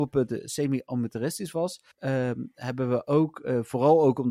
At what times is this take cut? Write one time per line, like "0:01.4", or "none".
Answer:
0:01.9